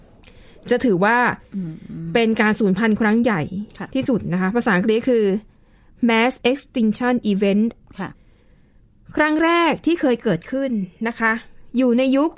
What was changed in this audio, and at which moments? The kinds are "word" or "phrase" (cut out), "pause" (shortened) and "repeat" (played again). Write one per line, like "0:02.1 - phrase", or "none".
0:06.4 - pause